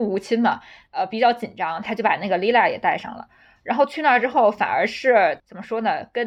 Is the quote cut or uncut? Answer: uncut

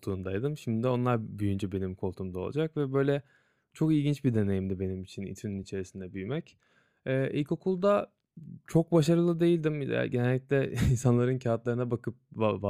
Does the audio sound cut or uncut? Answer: uncut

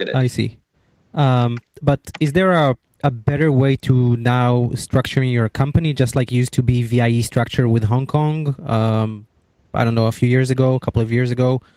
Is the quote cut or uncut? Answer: uncut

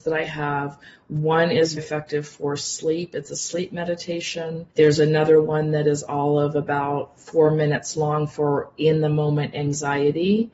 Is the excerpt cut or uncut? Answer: cut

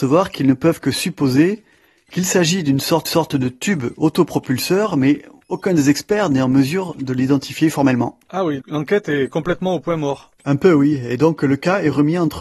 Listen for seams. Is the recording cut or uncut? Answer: cut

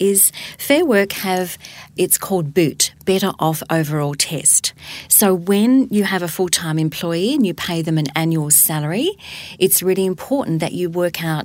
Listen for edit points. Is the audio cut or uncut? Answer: uncut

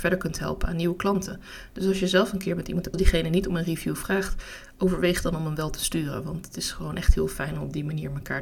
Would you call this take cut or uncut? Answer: cut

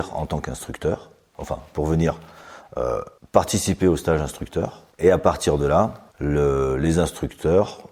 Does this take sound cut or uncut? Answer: cut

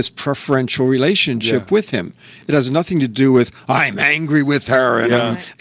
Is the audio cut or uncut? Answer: uncut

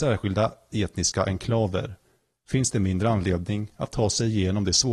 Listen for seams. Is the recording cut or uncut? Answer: uncut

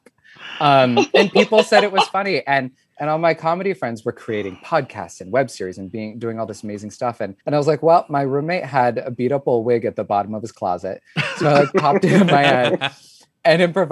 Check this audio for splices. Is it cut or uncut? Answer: cut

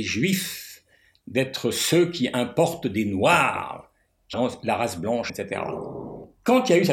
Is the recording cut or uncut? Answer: cut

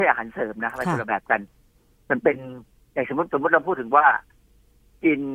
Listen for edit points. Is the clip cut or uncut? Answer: uncut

